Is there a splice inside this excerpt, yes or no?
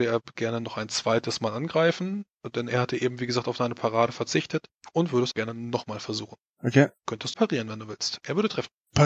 yes